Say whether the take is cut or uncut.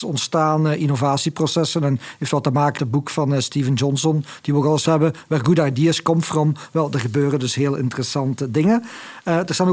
cut